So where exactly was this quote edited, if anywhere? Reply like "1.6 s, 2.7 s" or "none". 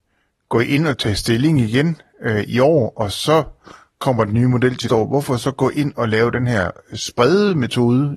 4.9 s

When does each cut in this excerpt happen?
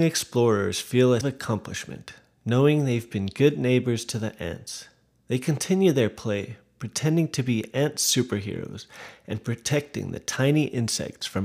1.2 s

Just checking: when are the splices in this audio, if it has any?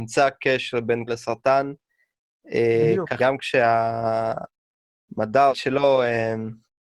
1.1 s, 3.2 s, 5.5 s

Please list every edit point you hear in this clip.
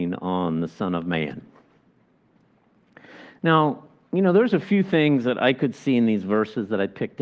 none

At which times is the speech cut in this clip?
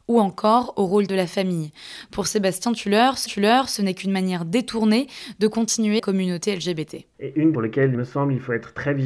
1.1 s, 3.3 s, 6.0 s, 7.1 s, 7.5 s, 7.9 s

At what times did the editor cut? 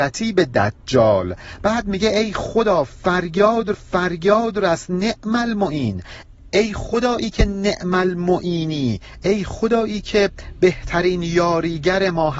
3.7 s

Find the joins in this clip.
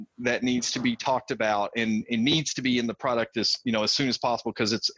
none

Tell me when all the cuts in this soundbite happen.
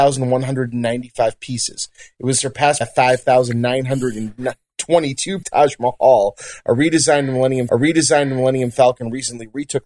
2.8 s, 5.4 s, 7.7 s

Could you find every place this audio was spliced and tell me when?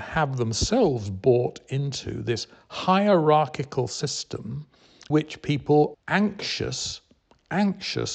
5.1 s, 5.9 s

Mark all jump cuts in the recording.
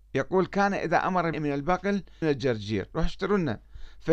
1.3 s, 2.2 s

